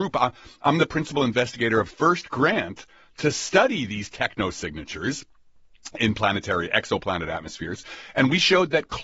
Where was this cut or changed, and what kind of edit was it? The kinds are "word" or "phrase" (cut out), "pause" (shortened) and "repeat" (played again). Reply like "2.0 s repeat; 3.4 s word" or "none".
1.9 s word